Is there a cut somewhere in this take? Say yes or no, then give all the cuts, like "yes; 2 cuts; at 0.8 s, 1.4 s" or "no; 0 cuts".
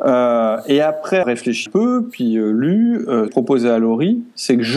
yes; 3 cuts; at 1.2 s, 1.7 s, 3.3 s